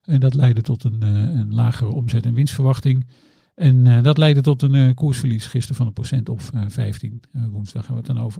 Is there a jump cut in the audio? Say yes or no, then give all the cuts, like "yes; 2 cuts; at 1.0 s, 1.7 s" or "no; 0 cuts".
no; 0 cuts